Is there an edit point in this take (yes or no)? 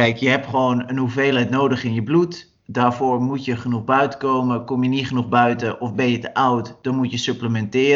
yes